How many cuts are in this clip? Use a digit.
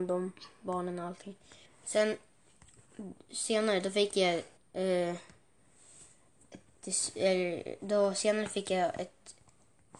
2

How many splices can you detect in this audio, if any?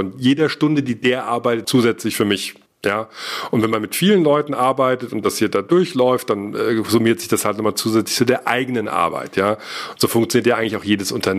2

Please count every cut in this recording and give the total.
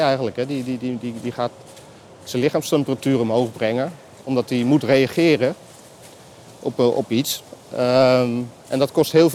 0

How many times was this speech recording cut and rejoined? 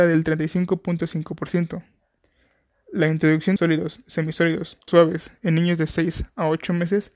2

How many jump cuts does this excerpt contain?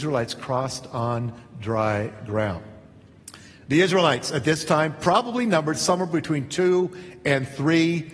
0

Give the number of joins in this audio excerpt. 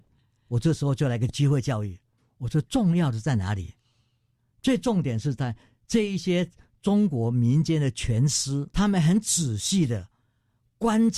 1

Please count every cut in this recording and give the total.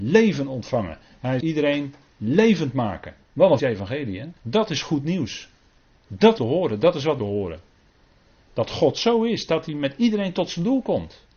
6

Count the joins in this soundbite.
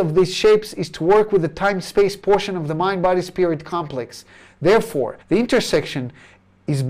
1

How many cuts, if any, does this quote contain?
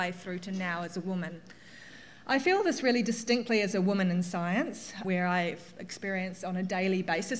1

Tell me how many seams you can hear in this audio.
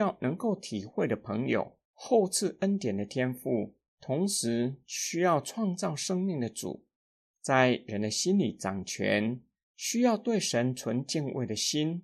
3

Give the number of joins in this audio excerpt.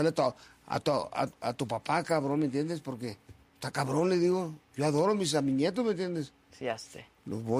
1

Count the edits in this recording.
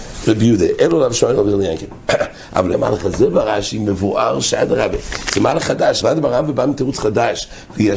2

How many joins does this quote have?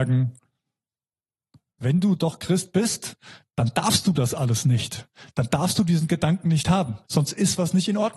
1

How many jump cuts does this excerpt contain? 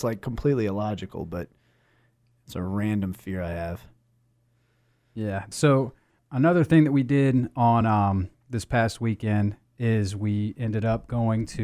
0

